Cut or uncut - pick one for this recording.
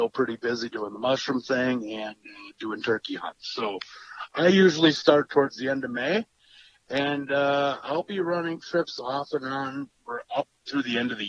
uncut